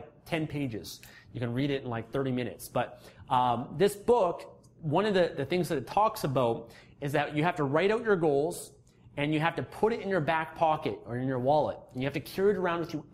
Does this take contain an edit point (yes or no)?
no